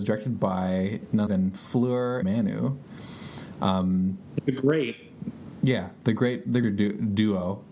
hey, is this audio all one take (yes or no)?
no